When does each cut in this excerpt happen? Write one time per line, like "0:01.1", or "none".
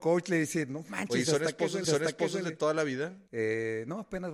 0:01.8
0:03.3